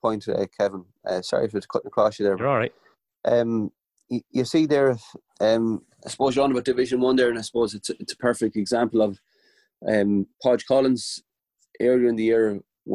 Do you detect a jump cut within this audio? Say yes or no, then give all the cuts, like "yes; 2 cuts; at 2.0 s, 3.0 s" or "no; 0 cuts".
no; 0 cuts